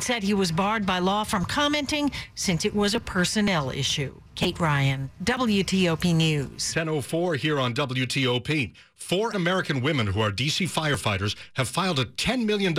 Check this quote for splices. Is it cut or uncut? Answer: cut